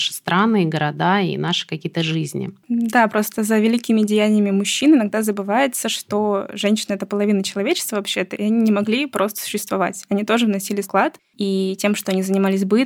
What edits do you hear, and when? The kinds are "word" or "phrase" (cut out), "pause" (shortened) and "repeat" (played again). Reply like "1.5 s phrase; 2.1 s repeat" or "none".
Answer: 10.8 s word